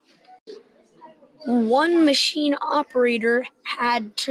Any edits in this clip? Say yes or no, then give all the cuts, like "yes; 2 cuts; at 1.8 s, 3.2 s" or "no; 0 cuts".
no; 0 cuts